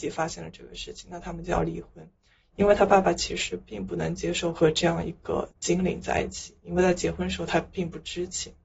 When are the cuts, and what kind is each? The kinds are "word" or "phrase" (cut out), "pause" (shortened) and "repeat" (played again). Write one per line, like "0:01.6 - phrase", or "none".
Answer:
0:05.5 - pause

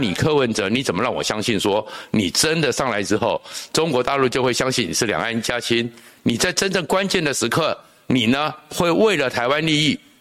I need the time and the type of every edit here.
none

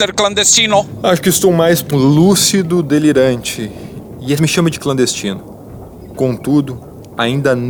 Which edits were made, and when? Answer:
0:01.9 - word
0:04.4 - phrase

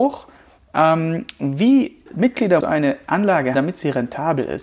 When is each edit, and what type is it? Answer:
0:02.1 - word
0:02.6 - word
0:03.5 - word

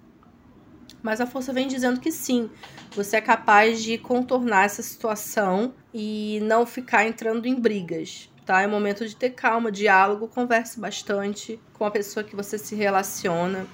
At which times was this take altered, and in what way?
0:05.8 - pause
0:11.7 - pause

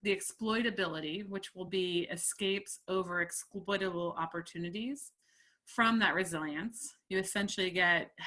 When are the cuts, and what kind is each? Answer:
none

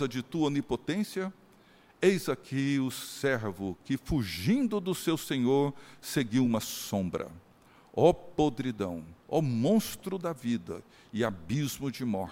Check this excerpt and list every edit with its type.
none

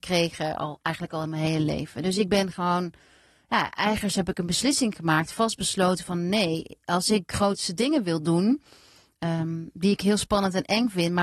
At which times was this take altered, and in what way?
none

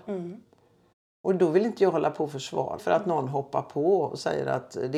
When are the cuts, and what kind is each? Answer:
0:02.8 - word

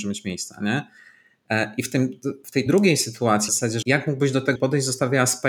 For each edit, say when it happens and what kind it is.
0:02.7 - word
0:03.5 - word
0:03.8 - word
0:04.6 - word

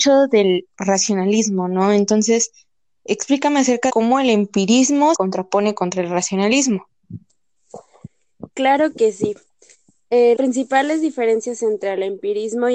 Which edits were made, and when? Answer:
0:03.9 - word
0:05.1 - word
0:10.3 - word

